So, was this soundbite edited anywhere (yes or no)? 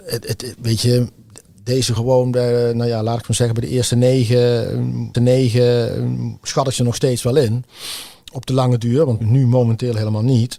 yes